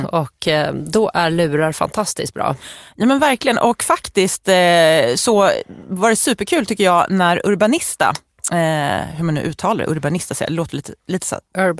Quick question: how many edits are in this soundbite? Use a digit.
0